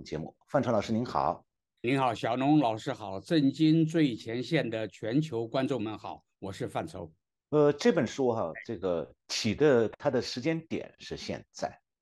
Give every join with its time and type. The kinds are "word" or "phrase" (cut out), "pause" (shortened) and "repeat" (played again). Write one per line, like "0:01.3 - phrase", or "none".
0:01.8 - word
0:09.2 - pause